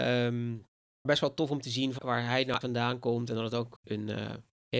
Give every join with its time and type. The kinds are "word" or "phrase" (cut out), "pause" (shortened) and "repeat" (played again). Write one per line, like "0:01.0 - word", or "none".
0:01.1 - word
0:02.0 - word
0:02.6 - word
0:03.8 - word

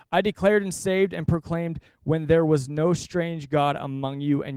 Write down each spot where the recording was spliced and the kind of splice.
none

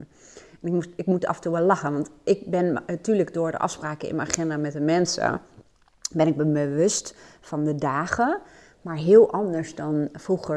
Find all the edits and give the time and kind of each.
none

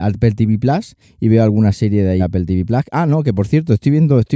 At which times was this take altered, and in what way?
0:01.0 - pause
0:02.2 - word

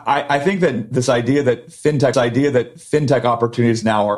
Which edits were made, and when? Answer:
0:02.1 - repeat

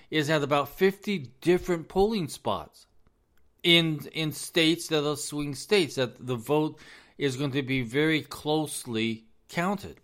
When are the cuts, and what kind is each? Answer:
none

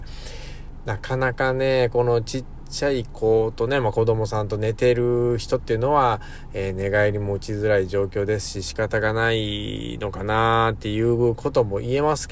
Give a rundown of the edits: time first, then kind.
none

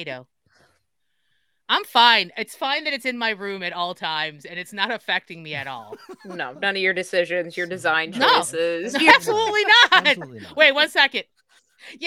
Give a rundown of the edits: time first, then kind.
none

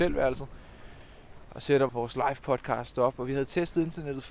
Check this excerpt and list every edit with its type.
0:01.4 - pause
0:01.9 - word

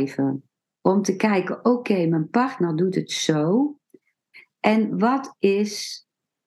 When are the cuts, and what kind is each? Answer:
none

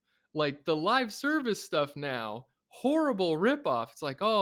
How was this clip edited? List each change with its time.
none

